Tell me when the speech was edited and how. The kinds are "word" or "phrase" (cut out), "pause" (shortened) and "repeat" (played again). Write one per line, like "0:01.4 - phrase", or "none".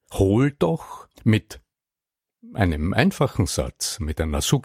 0:01.1 - pause